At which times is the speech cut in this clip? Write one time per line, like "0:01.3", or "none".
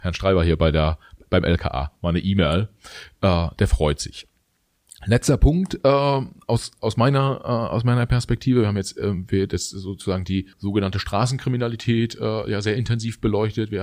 0:10.5